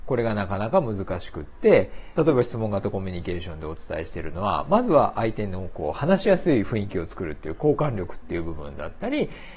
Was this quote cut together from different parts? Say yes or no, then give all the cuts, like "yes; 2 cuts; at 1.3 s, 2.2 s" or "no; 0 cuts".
yes; 1 cut; at 2.2 s